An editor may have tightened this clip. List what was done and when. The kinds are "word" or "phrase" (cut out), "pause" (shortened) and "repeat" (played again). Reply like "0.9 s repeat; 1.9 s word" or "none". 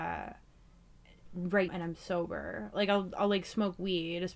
1.7 s word